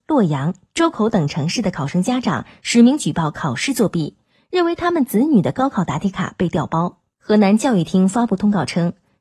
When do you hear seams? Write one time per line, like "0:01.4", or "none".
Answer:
none